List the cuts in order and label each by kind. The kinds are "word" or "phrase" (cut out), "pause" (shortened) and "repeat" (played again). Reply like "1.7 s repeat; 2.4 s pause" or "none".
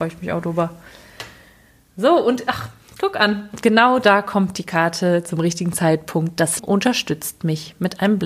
6.6 s word